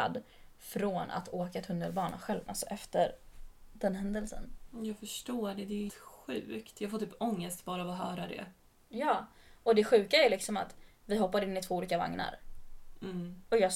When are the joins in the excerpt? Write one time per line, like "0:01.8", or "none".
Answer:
0:02.5
0:05.9